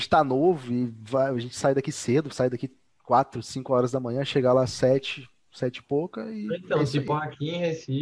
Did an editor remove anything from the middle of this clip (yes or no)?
no